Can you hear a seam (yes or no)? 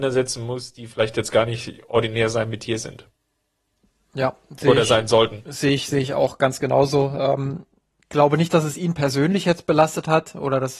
no